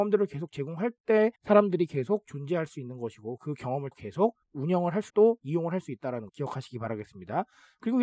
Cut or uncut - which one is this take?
cut